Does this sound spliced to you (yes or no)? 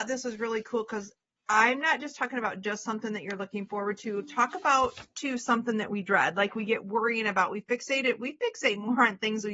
no